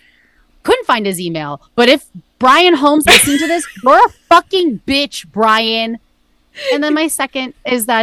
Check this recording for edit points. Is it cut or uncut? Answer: cut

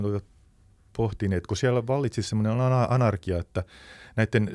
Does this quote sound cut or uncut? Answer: uncut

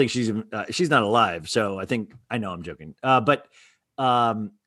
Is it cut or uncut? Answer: uncut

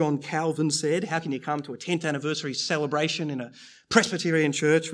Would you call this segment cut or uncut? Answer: uncut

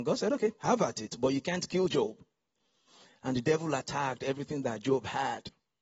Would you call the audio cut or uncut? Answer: uncut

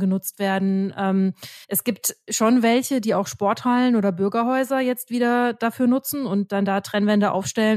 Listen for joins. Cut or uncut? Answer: cut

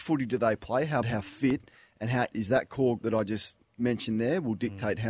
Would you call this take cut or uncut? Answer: cut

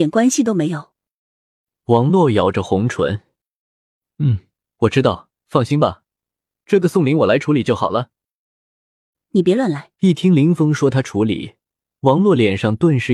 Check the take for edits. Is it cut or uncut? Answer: cut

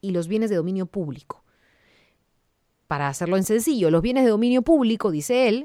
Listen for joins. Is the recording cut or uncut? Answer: uncut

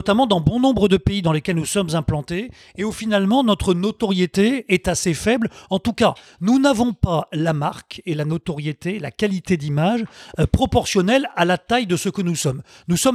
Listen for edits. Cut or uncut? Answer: uncut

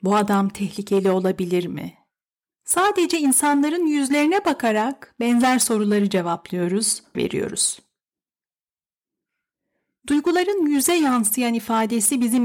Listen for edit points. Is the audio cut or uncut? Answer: cut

